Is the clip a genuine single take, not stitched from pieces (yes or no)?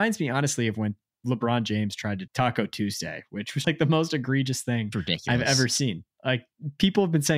no